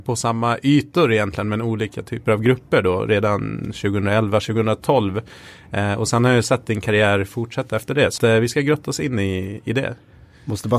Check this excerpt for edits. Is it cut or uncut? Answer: cut